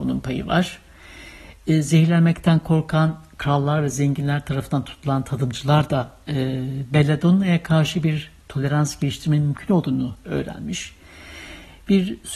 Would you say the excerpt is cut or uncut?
uncut